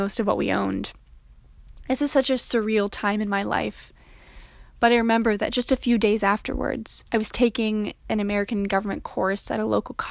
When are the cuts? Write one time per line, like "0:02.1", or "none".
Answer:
0:07.1